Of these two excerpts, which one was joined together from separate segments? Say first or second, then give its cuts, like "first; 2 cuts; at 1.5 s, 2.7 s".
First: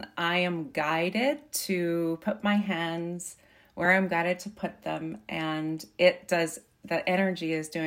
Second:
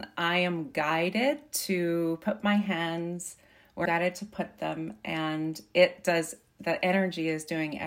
second; 1 cut; at 3.9 s